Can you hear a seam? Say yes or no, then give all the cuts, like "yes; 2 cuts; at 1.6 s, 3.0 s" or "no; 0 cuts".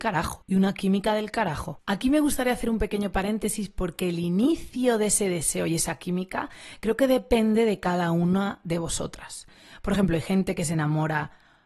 no; 0 cuts